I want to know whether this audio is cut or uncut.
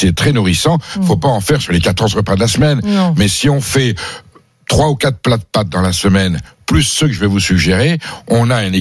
uncut